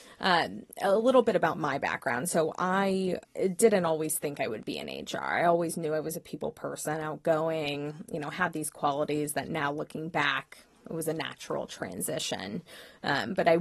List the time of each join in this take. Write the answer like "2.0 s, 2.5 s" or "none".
3.2 s